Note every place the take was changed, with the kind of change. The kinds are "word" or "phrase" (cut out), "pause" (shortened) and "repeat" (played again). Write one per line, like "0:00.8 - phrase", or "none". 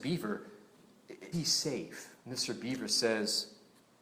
0:01.3 - word
0:02.2 - pause